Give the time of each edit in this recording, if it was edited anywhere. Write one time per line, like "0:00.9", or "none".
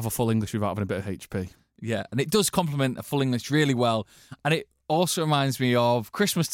none